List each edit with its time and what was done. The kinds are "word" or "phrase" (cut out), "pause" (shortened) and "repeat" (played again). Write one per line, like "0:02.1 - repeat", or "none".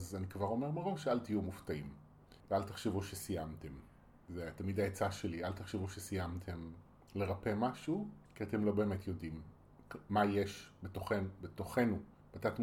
0:02.4 - pause
0:08.3 - pause

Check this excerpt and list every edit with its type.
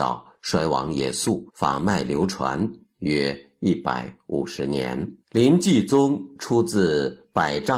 0:01.5 - pause
0:05.2 - pause

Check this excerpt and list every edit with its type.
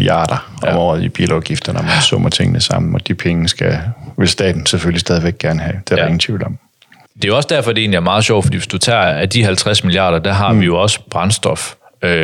none

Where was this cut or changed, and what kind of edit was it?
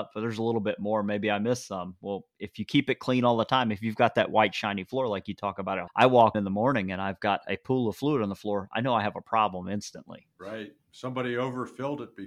0:05.9 - word
0:06.3 - word

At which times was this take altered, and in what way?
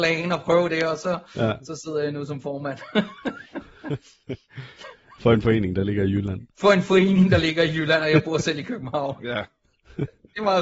0:06.5 - pause

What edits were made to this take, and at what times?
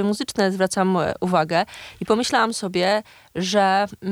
none

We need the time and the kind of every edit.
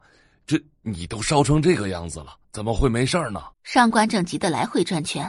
0:02.4 - pause
0:03.5 - pause

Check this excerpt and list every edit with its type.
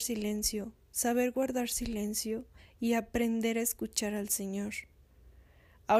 0:02.6 - pause

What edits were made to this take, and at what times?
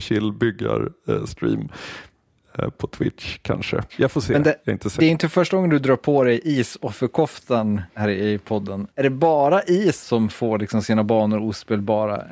0:07.9 - pause
0:08.9 - pause
0:10.0 - word

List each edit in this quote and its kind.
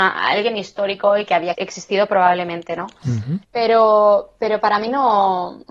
0:01.5 - word
0:03.4 - pause

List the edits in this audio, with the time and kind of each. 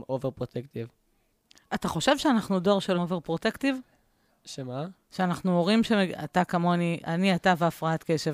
0:02.9 - word

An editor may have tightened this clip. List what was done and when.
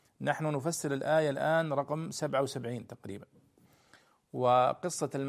none

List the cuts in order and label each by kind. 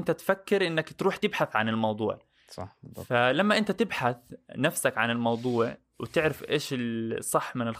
none

